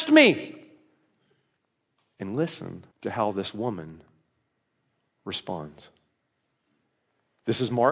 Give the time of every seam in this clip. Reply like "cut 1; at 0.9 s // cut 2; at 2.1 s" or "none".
cut 1; at 1.6 s // cut 2; at 2.9 s